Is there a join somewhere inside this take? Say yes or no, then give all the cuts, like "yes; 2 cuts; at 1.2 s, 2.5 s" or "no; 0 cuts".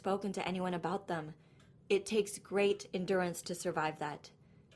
no; 0 cuts